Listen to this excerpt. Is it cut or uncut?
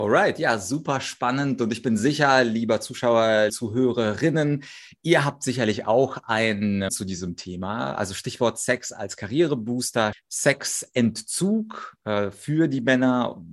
cut